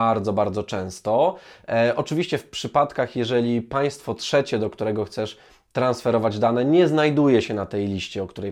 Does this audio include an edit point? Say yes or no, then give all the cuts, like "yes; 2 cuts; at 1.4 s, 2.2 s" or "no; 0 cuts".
no; 0 cuts